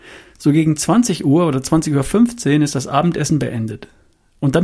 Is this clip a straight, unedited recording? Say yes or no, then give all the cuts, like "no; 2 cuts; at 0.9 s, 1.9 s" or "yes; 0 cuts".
yes; 0 cuts